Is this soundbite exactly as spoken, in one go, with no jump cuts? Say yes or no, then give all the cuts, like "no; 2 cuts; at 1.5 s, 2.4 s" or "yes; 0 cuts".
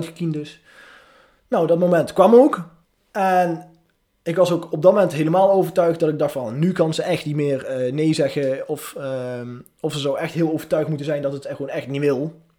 no; 1 cut; at 2.8 s